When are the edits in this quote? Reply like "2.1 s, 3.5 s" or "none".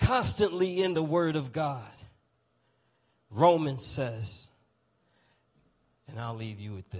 none

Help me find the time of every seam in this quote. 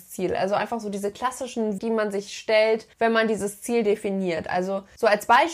1.8 s, 2.9 s

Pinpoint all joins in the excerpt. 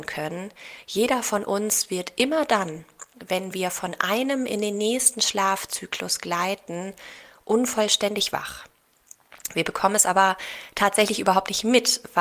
none

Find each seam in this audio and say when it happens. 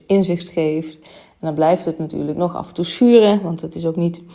none

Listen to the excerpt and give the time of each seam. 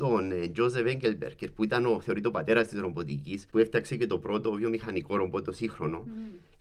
3.5 s

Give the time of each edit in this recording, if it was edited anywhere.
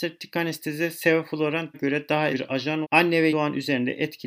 1.7 s, 2.3 s, 2.8 s, 3.3 s

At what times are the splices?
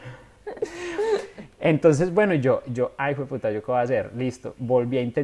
none

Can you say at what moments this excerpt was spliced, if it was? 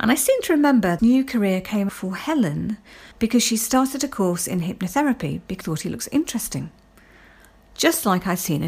1.0 s, 1.9 s, 3.1 s, 5.6 s

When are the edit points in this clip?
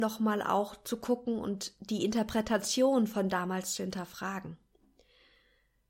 none

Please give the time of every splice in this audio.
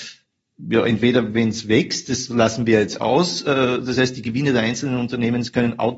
none

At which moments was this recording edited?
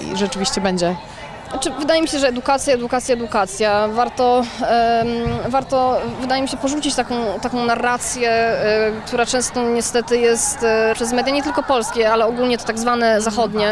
10.9 s

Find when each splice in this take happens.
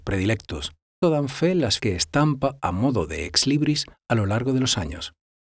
1.0 s, 1.8 s

